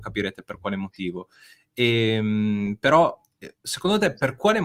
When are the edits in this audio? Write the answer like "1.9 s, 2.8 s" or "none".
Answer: none